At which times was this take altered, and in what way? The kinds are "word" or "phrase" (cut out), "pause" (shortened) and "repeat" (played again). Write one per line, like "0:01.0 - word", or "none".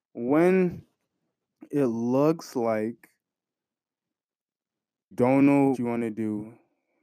0:05.1 - word
0:05.7 - word